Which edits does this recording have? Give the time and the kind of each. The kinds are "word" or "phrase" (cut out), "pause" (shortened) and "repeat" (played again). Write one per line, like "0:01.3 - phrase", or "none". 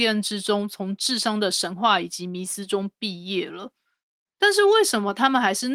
none

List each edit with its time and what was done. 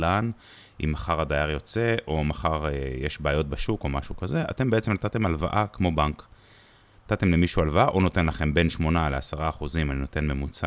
none

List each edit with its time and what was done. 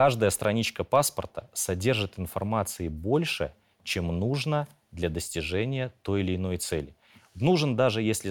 none

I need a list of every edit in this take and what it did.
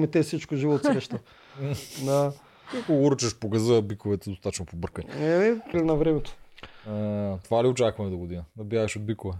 0:05.7 - phrase
0:07.4 - word

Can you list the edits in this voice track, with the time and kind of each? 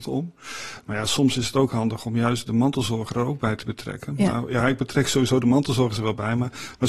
none

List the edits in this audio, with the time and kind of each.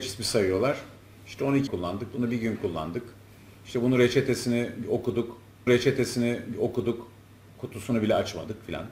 0:01.7 - word
0:05.7 - repeat

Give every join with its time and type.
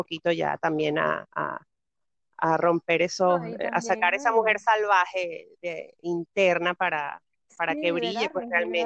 none

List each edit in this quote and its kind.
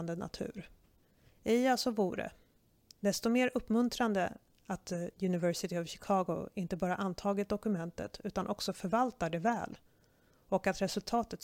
none

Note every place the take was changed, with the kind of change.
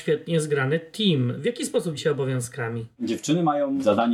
0:02.0 - word

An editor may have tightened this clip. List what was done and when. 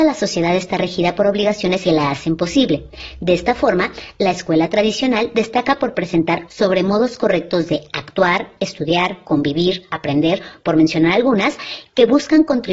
0:01.8 - phrase
0:06.5 - phrase

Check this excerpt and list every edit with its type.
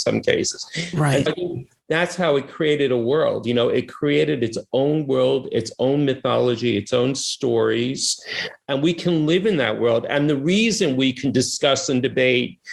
0:01.3 - word

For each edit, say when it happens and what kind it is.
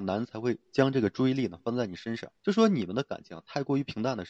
0:02.4 - pause

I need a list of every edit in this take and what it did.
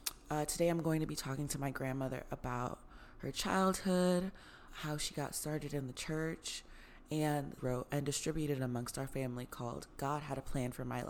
0:04.7 - word
0:07.6 - phrase

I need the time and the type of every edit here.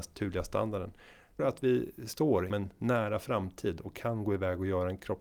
0:01.4 - word
0:02.5 - word

